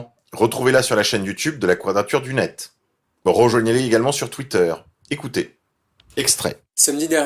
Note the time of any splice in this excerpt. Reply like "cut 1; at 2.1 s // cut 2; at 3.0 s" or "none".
none